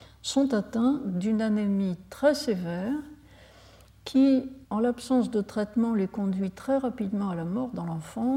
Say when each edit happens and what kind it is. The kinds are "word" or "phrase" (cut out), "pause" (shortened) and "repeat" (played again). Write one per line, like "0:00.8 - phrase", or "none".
0:04.6 - pause

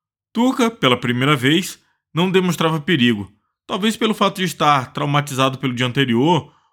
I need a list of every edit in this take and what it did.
none

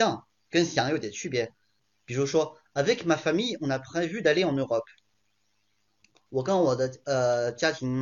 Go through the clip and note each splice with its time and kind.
none

